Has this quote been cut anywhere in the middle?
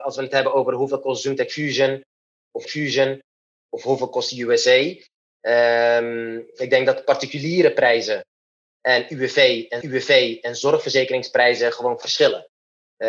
yes; 3 cuts; at 2.6 s, 9.8 s, 12.0 s

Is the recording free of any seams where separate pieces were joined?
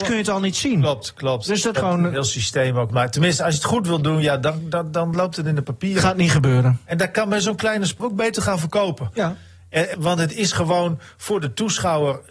no; 4 cuts; at 1.7 s, 2.9 s, 8.0 s, 9.9 s

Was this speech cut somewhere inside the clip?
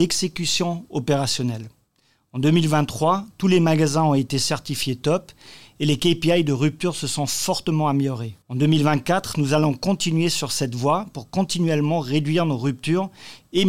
yes; 1 cut; at 8.4 s

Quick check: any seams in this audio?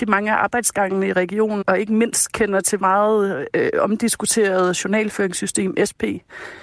yes; 2 cuts; at 1.6 s, 2.8 s

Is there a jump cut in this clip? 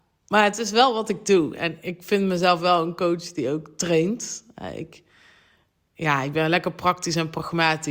no; 0 cuts

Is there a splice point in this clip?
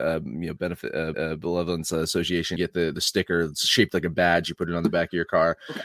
yes; 3 cuts; at 1.1 s, 2.6 s, 2.9 s

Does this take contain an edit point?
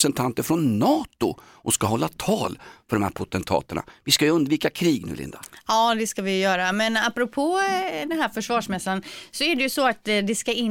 no; 0 cuts

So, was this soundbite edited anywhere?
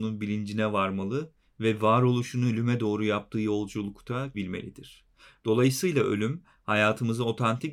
yes; 1 cut; at 4.3 s

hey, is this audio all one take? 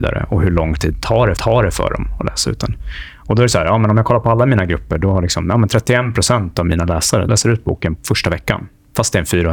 no; 3 cuts; at 1.4 s, 7.3 s, 8.0 s

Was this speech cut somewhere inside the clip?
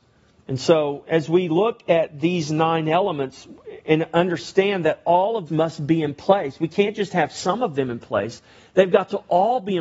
yes; 1 cut; at 5.5 s

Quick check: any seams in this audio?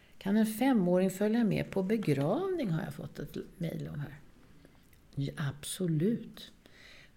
no; 0 cuts

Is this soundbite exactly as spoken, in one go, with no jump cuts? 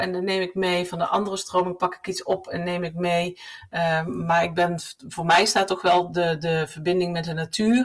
yes; 0 cuts

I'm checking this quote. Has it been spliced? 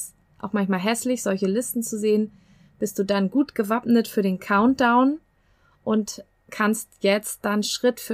no; 0 cuts

